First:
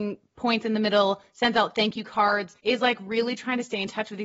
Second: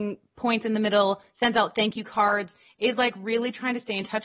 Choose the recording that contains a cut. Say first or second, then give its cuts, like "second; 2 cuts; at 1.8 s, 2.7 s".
first; 1 cut; at 2.6 s